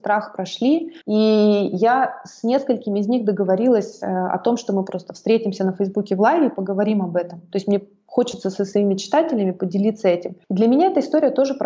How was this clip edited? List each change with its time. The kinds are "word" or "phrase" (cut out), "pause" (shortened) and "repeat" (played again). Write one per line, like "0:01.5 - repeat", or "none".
0:01.0 - pause
0:10.4 - pause